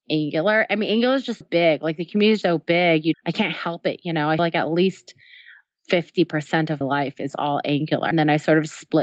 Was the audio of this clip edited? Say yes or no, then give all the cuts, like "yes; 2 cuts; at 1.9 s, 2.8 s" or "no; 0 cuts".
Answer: yes; 7 cuts; at 1.4 s, 2.4 s, 3.1 s, 4.4 s, 6.8 s, 7.3 s, 8.1 s